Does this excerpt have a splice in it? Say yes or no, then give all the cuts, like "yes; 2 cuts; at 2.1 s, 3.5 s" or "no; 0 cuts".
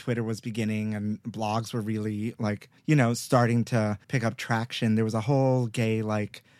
yes; 2 cuts; at 2.8 s, 4.0 s